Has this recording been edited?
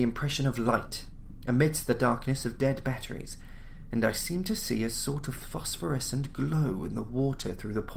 no; 0 cuts

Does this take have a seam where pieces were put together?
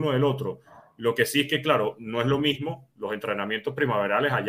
no; 0 cuts

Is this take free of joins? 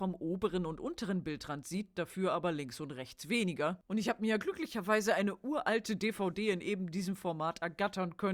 yes; 0 cuts

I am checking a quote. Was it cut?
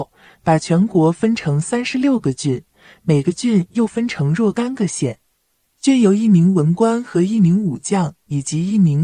no; 0 cuts

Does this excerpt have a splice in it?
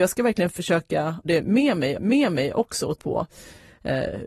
yes; 3 cuts; at 1.2 s, 2.0 s, 3.0 s

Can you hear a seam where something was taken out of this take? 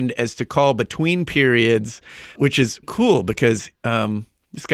yes; 3 cuts; at 2.4 s, 2.8 s, 3.8 s

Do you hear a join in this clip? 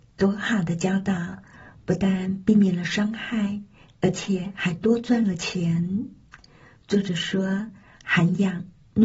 no; 0 cuts

